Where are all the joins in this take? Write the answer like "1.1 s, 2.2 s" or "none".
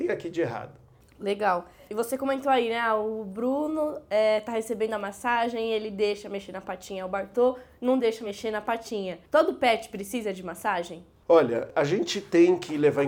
9.3 s